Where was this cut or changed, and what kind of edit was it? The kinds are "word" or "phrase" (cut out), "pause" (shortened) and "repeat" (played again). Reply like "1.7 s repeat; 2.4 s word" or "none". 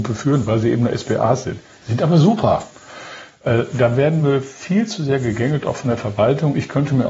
none